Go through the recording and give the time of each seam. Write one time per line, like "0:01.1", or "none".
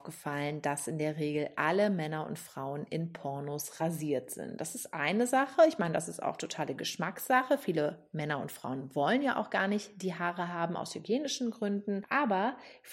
none